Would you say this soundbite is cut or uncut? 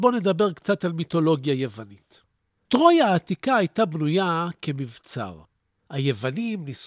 uncut